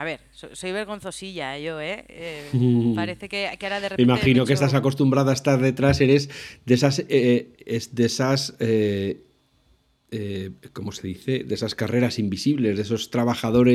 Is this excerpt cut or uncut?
uncut